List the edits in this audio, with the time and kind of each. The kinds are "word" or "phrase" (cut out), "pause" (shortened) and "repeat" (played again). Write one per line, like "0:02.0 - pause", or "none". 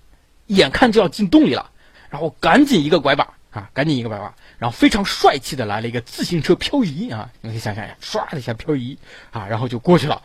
0:01.9 - phrase
0:03.4 - pause
0:07.3 - pause